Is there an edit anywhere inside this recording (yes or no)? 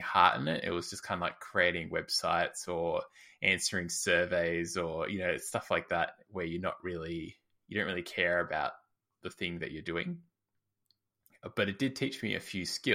no